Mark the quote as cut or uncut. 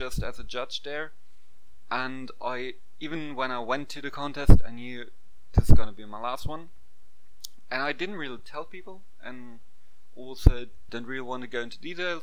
uncut